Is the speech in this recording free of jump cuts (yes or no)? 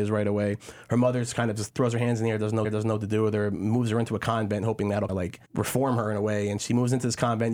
no